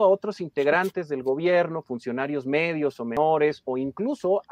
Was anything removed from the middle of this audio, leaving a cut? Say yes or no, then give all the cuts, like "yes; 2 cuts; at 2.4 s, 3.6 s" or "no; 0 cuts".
no; 0 cuts